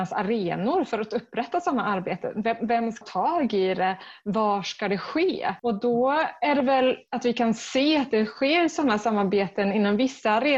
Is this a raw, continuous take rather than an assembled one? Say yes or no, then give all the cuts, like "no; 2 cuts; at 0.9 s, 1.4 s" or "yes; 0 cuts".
no; 1 cut; at 3.0 s